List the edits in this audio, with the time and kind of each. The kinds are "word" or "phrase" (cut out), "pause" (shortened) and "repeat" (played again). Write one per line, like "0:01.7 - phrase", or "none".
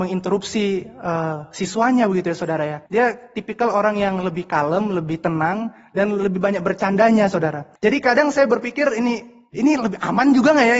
0:02.9 - pause
0:07.8 - pause